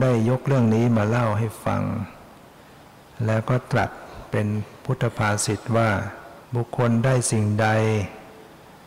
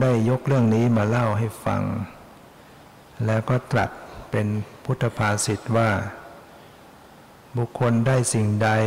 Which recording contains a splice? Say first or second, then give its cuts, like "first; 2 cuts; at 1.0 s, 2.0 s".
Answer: first; 1 cut; at 6.4 s